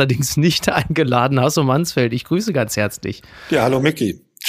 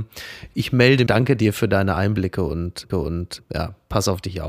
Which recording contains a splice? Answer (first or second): second